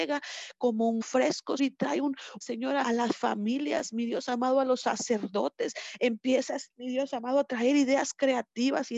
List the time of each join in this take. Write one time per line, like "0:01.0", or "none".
0:01.0
0:01.6
0:02.4
0:02.8

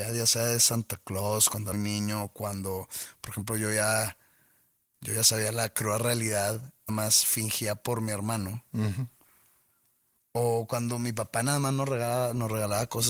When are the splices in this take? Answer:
0:01.7
0:06.9

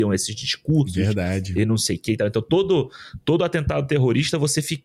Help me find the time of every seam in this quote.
none

